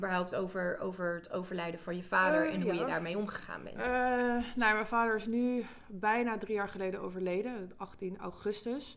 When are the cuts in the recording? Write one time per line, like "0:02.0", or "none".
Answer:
none